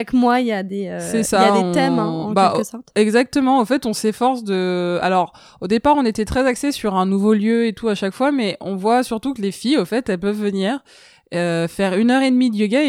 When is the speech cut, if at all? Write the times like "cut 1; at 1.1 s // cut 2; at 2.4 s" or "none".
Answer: none